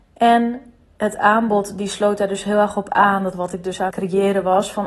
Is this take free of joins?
no; 2 cuts; at 3.3 s, 3.9 s

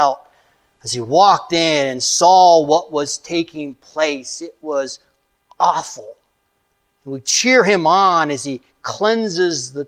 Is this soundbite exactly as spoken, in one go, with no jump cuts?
yes; 0 cuts

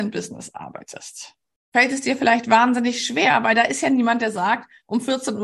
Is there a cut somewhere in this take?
no; 0 cuts

